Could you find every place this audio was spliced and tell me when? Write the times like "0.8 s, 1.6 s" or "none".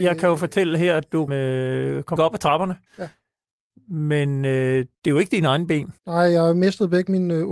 1.3 s, 2.2 s, 2.9 s, 4.9 s, 6.0 s